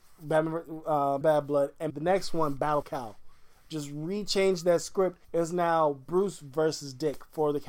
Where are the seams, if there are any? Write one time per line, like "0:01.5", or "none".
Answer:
0:01.2
0:01.9
0:02.8
0:05.2